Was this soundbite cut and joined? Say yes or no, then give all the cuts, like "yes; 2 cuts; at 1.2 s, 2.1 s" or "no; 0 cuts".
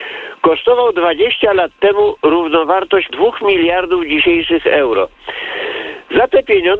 yes; 1 cut; at 3.1 s